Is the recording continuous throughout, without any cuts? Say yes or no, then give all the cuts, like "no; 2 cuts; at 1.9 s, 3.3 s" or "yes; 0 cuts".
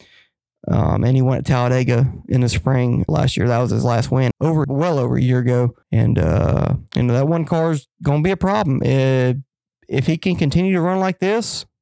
no; 5 cuts; at 3.1 s, 4.3 s, 4.6 s, 5.8 s, 6.9 s